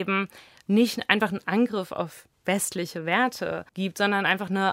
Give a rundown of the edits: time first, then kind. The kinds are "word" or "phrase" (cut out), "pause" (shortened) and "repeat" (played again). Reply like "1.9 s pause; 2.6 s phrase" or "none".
3.7 s pause